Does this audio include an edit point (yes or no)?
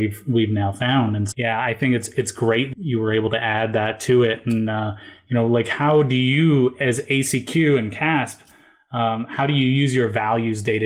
yes